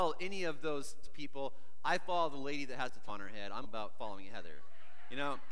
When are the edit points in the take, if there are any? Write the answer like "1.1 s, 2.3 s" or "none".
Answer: 1.0 s, 3.1 s, 3.6 s